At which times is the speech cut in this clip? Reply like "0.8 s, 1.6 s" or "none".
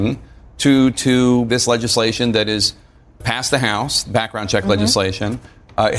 0.9 s, 1.5 s, 3.2 s, 4.0 s